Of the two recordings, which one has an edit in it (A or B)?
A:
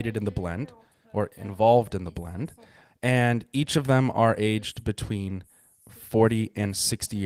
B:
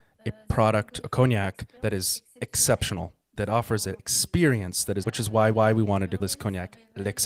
B